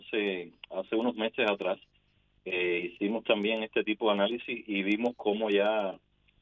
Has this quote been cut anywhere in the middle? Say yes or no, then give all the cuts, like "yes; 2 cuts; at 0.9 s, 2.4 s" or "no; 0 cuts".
no; 0 cuts